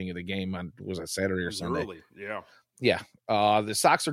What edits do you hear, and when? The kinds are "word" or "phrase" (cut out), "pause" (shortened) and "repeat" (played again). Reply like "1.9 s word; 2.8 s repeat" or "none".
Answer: none